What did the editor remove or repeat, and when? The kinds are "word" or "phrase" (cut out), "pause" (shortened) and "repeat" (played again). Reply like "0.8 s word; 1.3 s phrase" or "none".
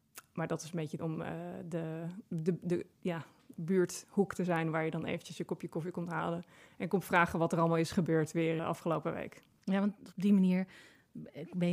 1.0 s word; 8.6 s word

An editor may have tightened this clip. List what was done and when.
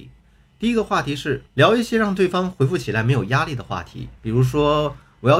1.5 s pause; 4.2 s pause

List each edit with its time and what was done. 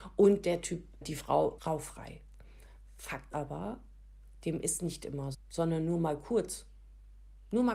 1.0 s word; 1.6 s word; 3.3 s word; 5.3 s word

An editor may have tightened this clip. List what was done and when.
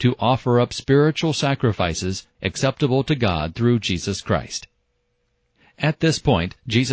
none

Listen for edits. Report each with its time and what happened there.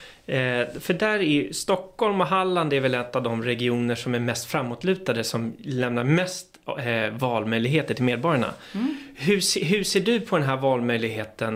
none

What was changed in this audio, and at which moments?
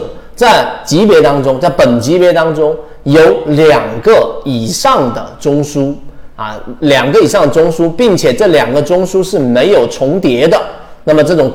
none

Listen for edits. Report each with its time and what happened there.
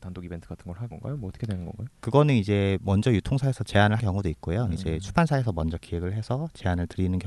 0.9 s word; 1.9 s pause; 4.0 s word

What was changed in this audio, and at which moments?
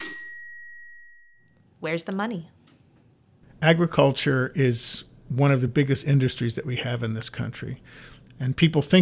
none

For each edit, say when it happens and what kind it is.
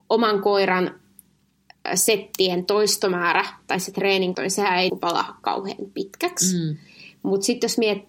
4.3 s word; 4.9 s word

